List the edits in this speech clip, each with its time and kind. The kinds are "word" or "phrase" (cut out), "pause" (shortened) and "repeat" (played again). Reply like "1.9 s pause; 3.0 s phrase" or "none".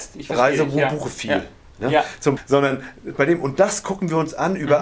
2.4 s word